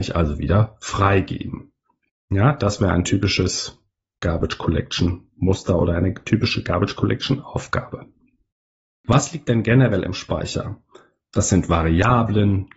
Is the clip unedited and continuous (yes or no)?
yes